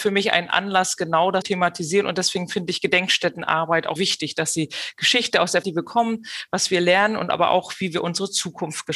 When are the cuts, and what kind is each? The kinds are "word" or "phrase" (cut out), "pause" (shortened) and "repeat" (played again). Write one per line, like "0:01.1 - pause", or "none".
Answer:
0:01.4 - word
0:04.0 - word
0:05.6 - word